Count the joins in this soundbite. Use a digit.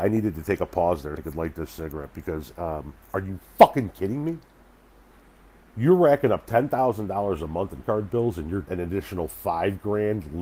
6